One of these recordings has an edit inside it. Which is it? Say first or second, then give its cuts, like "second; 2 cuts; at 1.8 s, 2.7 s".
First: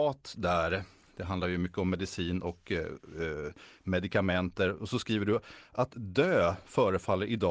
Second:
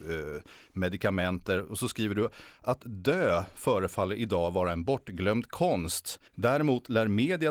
second; 1 cut; at 6.3 s